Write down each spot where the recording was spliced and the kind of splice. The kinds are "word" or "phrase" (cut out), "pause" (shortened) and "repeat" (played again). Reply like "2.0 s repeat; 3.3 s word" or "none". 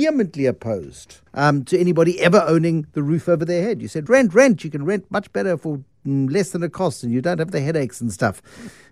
1.3 s pause; 4.1 s word